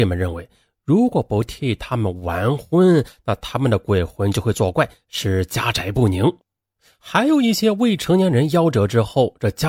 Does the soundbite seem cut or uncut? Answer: uncut